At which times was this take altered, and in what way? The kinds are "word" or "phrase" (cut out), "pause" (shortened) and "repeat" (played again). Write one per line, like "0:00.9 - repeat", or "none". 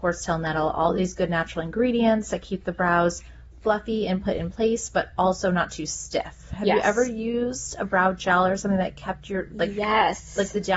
none